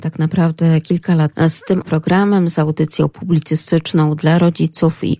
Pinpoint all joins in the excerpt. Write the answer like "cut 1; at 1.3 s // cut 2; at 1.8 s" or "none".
cut 1; at 1.3 s // cut 2; at 1.8 s